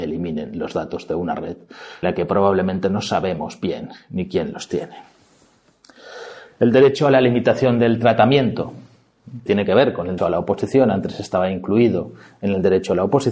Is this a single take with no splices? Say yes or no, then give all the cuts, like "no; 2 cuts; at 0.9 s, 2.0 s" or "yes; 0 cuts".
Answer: no; 3 cuts; at 2.0 s, 9.5 s, 10.2 s